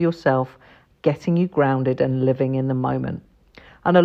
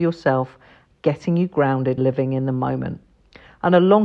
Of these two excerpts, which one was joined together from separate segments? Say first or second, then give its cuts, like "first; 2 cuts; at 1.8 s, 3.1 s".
second; 1 cut; at 2.0 s